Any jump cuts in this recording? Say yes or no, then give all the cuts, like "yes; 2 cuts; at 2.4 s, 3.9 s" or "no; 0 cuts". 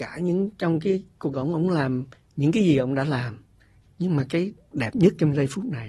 yes; 2 cuts; at 1.3 s, 4.7 s